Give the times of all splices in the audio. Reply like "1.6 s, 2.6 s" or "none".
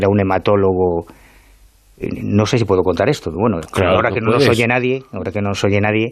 none